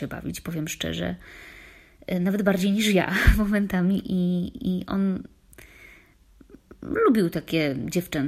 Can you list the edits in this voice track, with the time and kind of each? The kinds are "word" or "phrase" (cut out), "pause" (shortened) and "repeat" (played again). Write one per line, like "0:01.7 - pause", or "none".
none

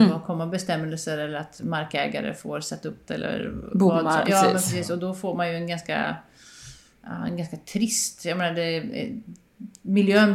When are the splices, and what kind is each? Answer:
0:03.1 - word
0:04.2 - word

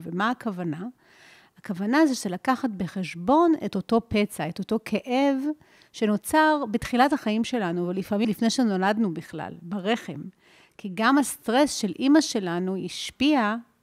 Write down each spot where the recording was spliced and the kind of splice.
0:08.2 - word

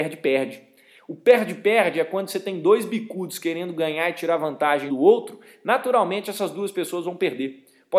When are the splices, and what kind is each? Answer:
0:04.9 - word

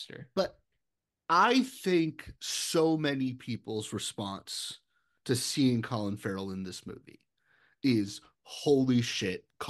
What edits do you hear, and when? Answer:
none

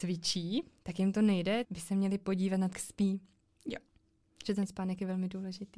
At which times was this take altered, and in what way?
0:01.6 - word
0:02.7 - word

